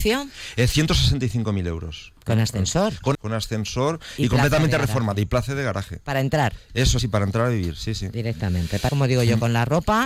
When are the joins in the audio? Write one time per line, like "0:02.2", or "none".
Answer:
0:03.1
0:07.0
0:08.9